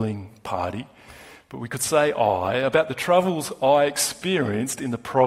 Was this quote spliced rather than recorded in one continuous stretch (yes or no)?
no